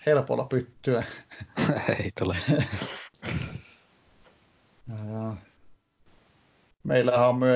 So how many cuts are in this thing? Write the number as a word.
zero